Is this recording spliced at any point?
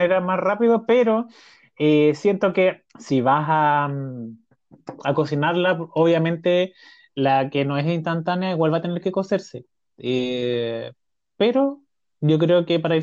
yes; 1 cut; at 2.9 s

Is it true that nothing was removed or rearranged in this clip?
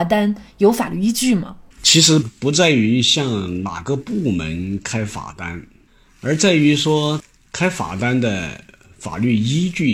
no; 1 cut; at 1.7 s

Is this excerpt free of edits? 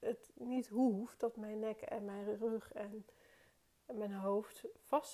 yes; 0 cuts

